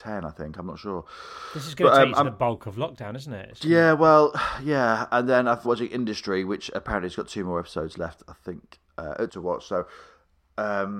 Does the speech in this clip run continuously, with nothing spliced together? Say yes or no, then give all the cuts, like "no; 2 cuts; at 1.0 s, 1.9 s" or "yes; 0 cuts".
no; 2 cuts; at 5.6 s, 9.3 s